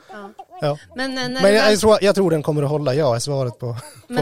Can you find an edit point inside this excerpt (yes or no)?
no